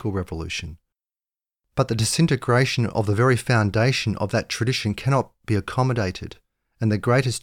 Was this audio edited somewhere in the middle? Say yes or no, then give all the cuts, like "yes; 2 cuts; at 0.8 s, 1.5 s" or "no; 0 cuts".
no; 0 cuts